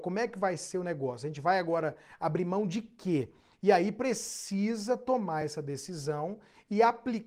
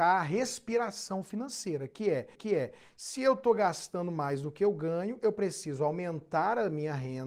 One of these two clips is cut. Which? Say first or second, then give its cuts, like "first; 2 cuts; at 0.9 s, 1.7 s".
second; 1 cut; at 2.3 s